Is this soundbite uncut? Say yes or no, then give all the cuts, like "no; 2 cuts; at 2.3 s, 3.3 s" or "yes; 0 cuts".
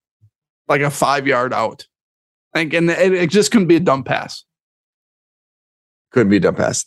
yes; 0 cuts